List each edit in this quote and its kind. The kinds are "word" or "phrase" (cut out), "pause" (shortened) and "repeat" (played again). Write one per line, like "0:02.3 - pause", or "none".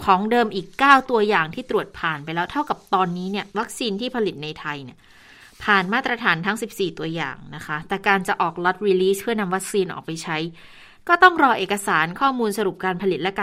0:03.5 - pause